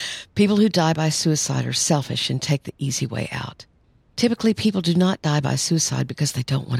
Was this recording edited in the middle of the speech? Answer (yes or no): yes